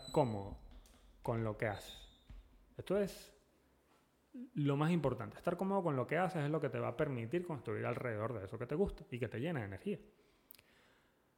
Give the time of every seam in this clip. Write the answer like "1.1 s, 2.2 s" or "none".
none

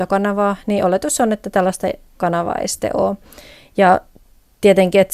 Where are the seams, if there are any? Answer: none

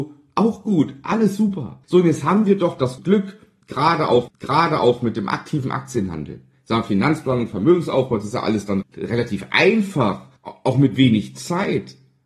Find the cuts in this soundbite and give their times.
1.8 s, 3.0 s, 4.3 s, 8.8 s, 10.4 s

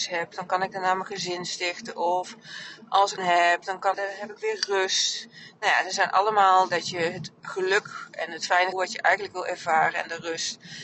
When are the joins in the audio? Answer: 3.2 s, 3.9 s, 6.7 s, 7.4 s, 8.7 s

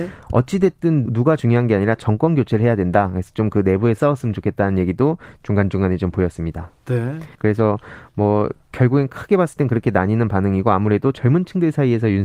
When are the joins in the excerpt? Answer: 1.1 s, 4.0 s, 7.3 s

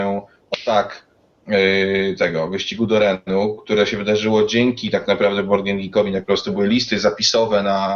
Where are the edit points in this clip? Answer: 6.2 s

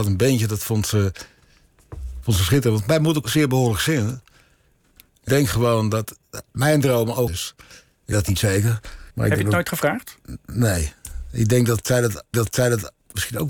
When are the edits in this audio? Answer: 3.2 s, 5.3 s, 6.4 s, 7.3 s, 8.1 s, 9.1 s, 12.3 s

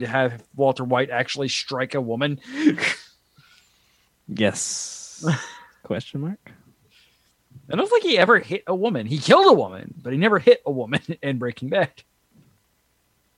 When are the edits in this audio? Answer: none

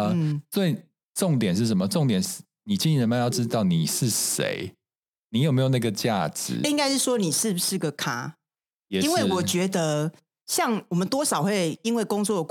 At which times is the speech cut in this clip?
none

